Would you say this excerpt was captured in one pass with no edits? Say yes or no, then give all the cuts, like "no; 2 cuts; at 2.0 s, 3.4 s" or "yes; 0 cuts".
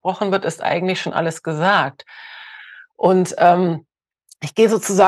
yes; 0 cuts